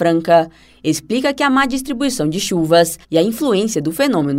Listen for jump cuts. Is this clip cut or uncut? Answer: cut